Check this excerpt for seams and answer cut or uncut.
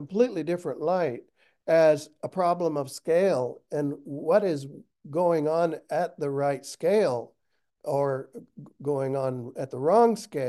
uncut